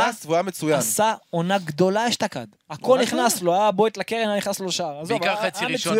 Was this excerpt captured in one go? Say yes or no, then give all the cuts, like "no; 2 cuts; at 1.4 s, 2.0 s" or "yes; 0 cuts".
yes; 0 cuts